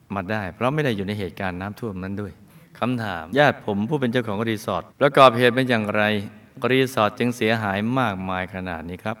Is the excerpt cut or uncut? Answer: cut